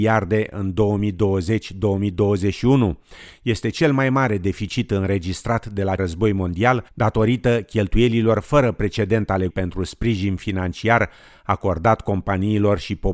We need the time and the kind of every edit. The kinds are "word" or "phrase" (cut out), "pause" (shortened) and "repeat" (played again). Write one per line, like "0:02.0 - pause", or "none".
0:06.0 - phrase
0:06.9 - pause
0:09.5 - word